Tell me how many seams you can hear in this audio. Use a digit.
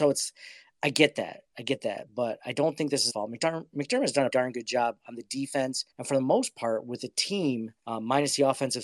4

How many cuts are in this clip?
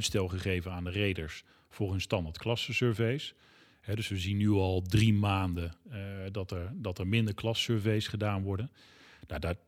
0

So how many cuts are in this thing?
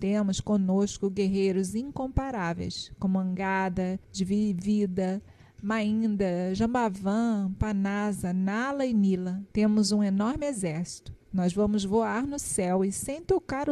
3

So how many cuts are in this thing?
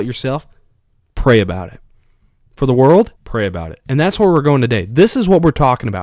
1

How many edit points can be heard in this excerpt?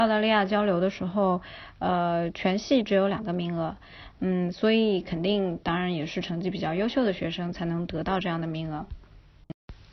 0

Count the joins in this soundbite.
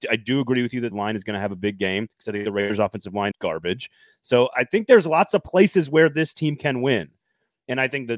3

